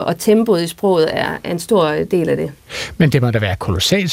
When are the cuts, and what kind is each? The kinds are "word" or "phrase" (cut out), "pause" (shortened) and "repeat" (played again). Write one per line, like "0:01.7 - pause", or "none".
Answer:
none